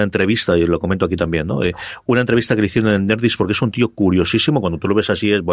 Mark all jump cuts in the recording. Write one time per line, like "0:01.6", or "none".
none